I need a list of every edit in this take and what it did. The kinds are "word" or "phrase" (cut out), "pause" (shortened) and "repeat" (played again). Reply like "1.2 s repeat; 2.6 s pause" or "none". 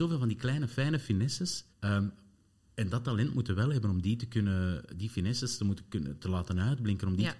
1.7 s pause